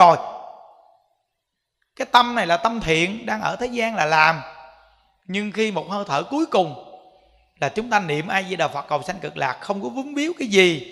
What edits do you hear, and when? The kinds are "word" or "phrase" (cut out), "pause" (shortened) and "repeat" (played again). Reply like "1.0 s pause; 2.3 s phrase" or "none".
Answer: none